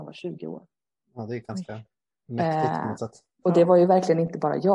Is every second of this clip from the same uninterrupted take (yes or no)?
yes